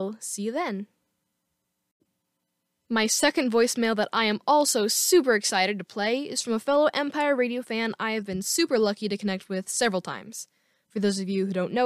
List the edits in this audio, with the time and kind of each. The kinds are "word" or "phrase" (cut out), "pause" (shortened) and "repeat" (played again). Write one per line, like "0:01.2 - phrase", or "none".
none